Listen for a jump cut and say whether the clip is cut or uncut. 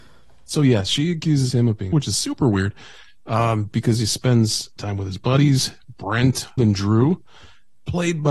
cut